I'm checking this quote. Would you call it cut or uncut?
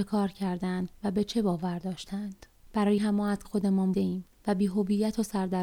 cut